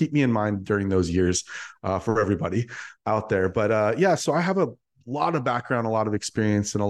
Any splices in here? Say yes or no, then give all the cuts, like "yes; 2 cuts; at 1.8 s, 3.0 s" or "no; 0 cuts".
no; 0 cuts